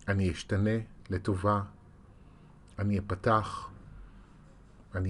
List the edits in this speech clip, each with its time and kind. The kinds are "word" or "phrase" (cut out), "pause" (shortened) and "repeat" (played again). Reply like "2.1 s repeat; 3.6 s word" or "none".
1.0 s pause